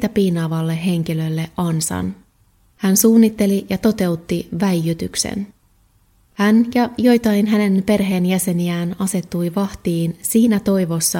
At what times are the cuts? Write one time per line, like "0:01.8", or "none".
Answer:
none